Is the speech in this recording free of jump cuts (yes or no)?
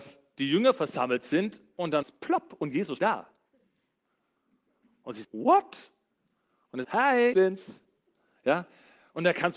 no